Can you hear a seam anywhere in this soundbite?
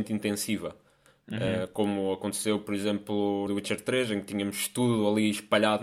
yes; 1 cut; at 3.5 s

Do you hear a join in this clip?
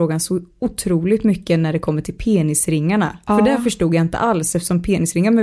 no; 0 cuts

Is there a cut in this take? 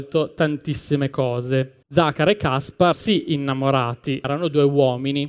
yes; 3 cuts; at 1.8 s, 2.9 s, 4.2 s

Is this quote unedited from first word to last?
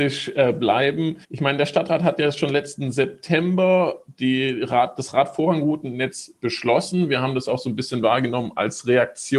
no; 1 cut; at 1.2 s

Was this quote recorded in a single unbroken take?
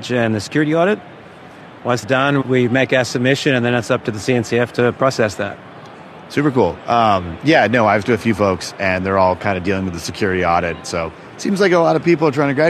no; 3 cuts; at 2.0 s, 2.4 s, 8.0 s

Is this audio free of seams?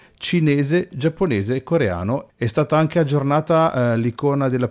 yes; 0 cuts

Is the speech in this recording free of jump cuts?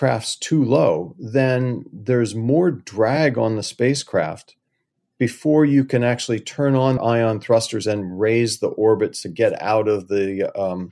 no; 1 cut; at 7.0 s

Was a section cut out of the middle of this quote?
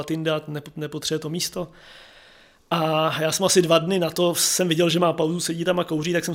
no; 0 cuts

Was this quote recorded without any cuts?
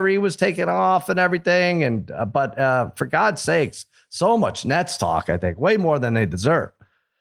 yes; 0 cuts

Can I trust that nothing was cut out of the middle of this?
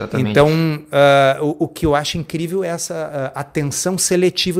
yes; 0 cuts

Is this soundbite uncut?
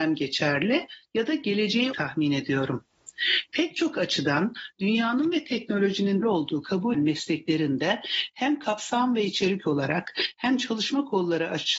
no; 3 cuts; at 1.9 s, 6.2 s, 6.9 s

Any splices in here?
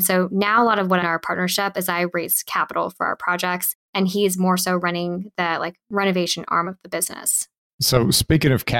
yes; 1 cut; at 1.0 s

